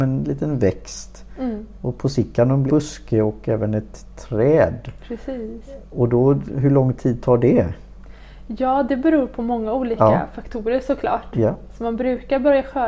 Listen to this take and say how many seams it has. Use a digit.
1